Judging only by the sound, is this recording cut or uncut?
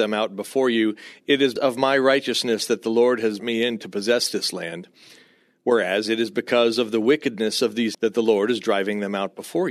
cut